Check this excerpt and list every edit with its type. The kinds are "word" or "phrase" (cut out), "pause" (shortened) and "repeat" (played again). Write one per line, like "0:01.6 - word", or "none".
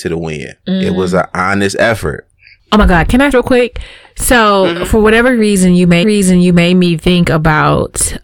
0:03.3 - phrase
0:06.0 - repeat